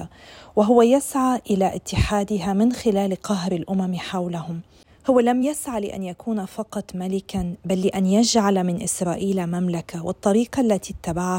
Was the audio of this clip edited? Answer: no; 0 cuts

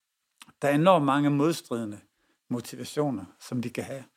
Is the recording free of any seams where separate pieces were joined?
yes; 0 cuts

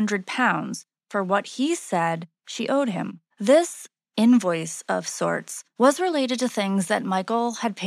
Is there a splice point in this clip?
yes; 2 cuts; at 3.3 s, 5.7 s

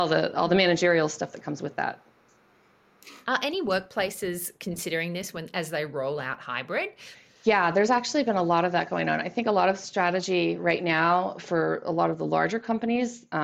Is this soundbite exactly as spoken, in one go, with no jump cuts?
yes; 0 cuts

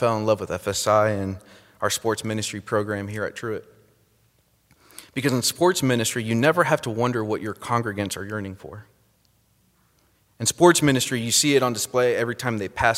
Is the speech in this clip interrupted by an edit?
no; 0 cuts

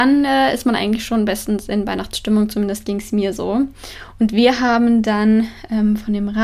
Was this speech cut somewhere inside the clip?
no; 0 cuts

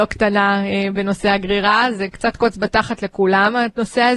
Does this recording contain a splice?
no; 0 cuts

